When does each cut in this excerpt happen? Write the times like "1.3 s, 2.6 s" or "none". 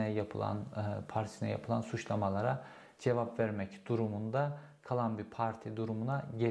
none

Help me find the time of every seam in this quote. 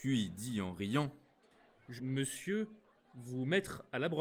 2.0 s

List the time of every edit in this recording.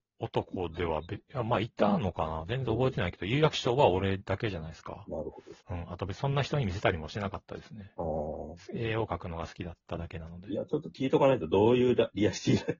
5.6 s

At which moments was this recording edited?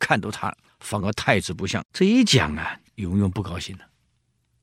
1.9 s

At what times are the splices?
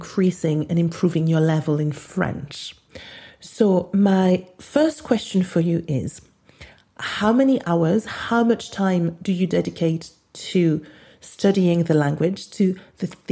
none

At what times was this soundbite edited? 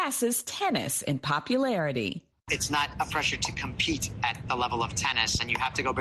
none

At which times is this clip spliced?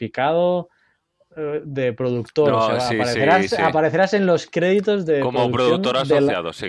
none

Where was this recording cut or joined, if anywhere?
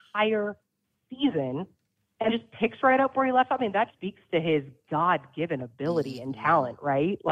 2.3 s, 3.9 s

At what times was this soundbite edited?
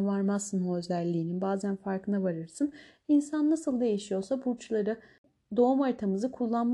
none

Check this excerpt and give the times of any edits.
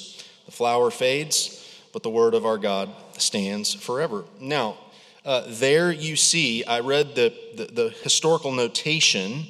none

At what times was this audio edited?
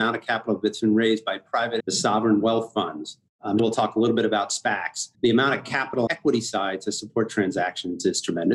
1.8 s, 3.6 s, 5.1 s, 6.1 s

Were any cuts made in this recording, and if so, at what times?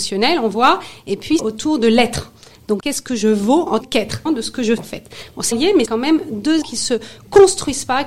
1.4 s, 2.8 s, 3.8 s, 4.3 s, 4.8 s, 5.5 s, 5.9 s, 6.6 s

